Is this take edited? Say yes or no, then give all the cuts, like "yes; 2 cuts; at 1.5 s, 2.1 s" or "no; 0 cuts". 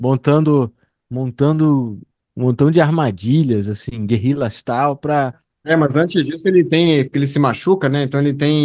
no; 0 cuts